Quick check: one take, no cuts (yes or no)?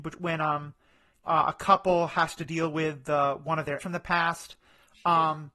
no